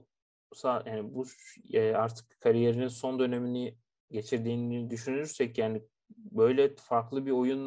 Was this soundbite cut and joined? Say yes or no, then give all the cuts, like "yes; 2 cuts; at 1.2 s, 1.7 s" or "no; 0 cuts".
no; 0 cuts